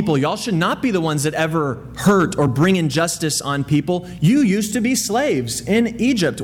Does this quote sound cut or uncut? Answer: uncut